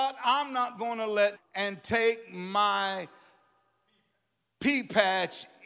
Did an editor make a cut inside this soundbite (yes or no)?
yes